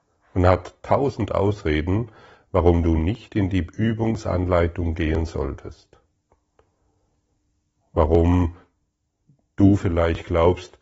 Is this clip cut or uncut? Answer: uncut